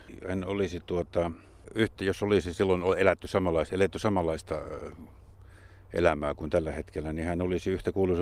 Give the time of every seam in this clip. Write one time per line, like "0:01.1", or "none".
none